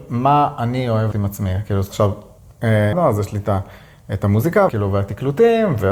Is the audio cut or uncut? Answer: cut